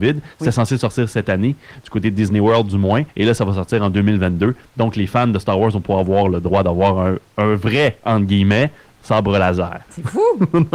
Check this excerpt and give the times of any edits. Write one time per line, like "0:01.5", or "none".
0:03.1